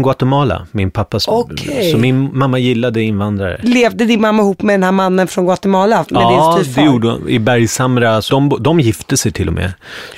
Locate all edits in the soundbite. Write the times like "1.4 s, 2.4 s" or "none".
8.3 s